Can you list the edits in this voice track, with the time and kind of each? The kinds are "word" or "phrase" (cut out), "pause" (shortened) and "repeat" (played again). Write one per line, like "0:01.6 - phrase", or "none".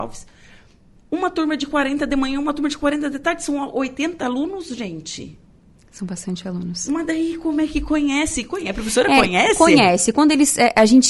none